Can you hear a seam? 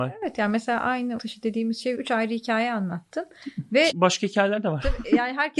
yes; 3 cuts; at 1.2 s, 2.0 s, 3.9 s

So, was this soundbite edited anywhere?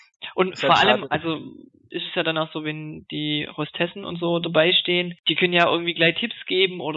no; 0 cuts

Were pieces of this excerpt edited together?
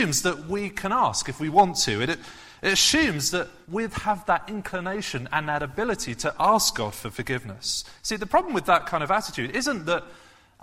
yes; 1 cut; at 3.6 s

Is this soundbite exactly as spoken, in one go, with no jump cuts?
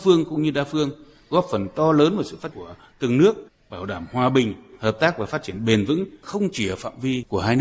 no; 1 cut; at 2.5 s

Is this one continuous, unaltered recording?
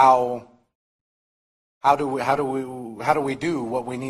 yes; 0 cuts

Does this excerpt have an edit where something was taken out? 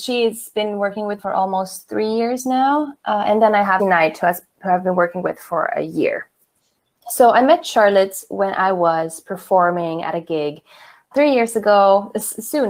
yes; 3 cuts; at 1.2 s, 3.8 s, 11.1 s

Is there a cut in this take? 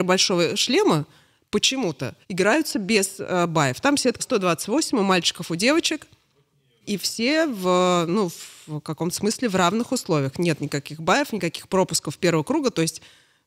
yes; 4 cuts; at 2.2 s, 3.8 s, 4.2 s, 6.8 s

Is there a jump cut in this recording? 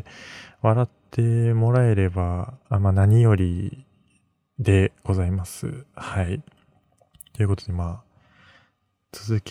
no; 0 cuts

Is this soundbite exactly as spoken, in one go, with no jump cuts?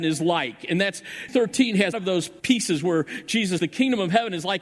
no; 4 cuts; at 1.3 s, 1.9 s, 2.4 s, 3.6 s

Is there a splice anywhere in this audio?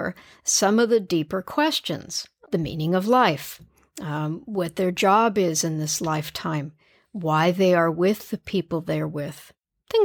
yes; 1 cut; at 2.4 s

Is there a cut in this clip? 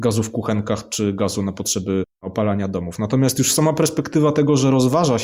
no; 0 cuts

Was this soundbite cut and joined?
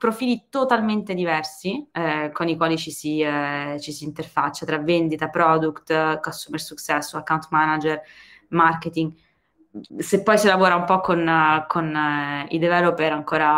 yes; 2 cuts; at 1.9 s, 9.9 s

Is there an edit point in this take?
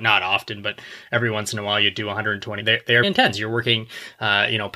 yes; 2 cuts; at 2.6 s, 3.0 s

